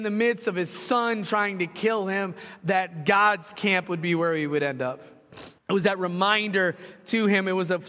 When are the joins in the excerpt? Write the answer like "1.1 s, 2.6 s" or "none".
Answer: 5.6 s